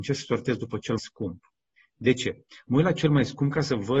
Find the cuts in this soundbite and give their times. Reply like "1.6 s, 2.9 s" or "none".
1.0 s, 1.8 s